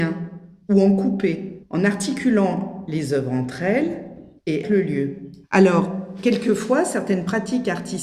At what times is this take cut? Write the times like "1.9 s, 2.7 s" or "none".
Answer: 4.6 s, 5.4 s